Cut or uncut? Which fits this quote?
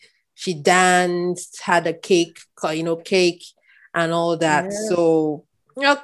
cut